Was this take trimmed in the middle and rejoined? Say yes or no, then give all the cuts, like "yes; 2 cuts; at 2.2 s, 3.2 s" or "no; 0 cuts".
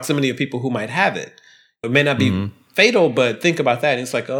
yes; 1 cut; at 1.8 s